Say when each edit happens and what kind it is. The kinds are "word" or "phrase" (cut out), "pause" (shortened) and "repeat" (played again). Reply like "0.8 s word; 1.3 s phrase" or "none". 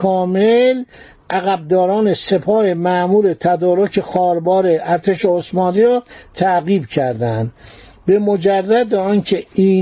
none